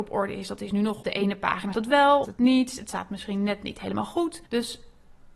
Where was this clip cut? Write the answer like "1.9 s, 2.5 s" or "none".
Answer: 1.0 s, 1.7 s, 2.2 s, 4.5 s